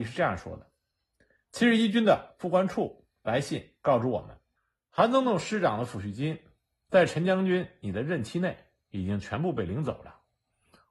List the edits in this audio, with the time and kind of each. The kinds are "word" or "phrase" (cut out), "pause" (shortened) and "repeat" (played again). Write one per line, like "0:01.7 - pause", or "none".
none